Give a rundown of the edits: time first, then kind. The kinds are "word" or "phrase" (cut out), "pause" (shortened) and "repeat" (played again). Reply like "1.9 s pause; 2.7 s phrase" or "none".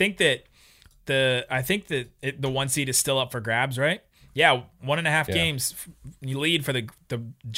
none